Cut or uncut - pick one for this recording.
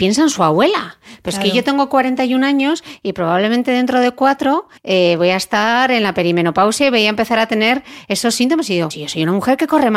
cut